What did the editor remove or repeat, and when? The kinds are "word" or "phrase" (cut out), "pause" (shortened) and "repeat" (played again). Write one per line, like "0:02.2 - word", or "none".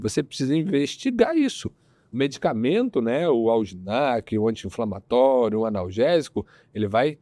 none